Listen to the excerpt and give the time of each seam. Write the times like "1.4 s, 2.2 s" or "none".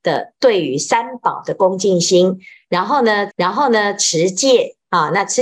3.3 s

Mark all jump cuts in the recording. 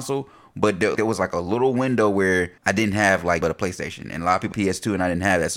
1.0 s, 2.6 s, 3.4 s, 4.5 s

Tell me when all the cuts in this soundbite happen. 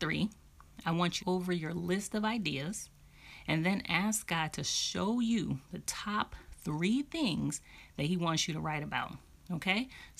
1.2 s, 5.6 s

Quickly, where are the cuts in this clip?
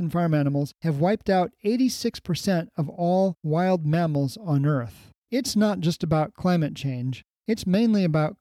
5.2 s

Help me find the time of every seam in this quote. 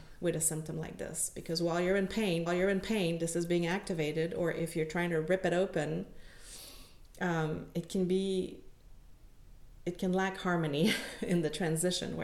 2.5 s

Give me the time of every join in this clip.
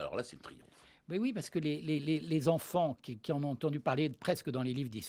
none

